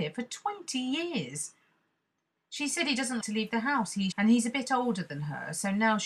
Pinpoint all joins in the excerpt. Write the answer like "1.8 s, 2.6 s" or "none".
3.2 s, 4.1 s